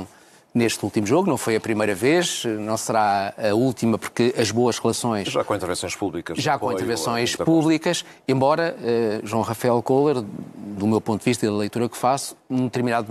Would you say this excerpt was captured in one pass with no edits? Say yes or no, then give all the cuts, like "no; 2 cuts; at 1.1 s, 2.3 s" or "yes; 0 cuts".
yes; 0 cuts